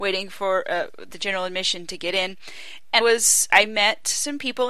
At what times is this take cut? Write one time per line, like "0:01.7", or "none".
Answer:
0:01.1
0:03.0
0:03.5